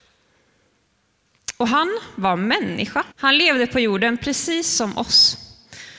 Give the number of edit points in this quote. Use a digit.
1